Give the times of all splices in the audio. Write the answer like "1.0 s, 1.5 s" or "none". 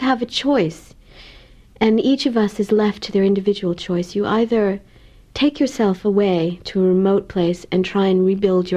none